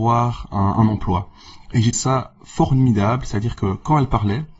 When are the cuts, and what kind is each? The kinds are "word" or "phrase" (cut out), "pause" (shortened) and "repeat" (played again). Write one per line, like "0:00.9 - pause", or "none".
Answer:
0:01.9 - word